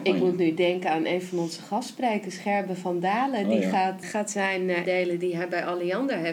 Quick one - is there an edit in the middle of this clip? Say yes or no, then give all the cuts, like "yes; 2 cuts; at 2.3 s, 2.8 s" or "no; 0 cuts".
yes; 2 cuts; at 4.0 s, 4.8 s